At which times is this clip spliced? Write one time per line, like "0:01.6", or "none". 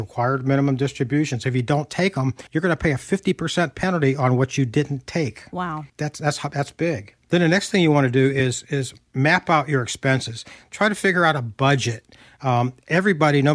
0:02.5
0:05.9